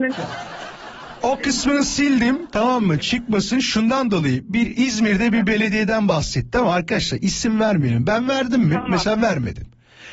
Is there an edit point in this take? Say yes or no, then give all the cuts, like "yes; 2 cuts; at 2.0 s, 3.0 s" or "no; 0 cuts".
no; 0 cuts